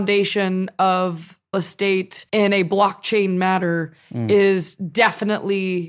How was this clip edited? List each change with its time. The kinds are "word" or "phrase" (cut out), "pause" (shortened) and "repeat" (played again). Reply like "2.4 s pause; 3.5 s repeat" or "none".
1.5 s word; 2.3 s pause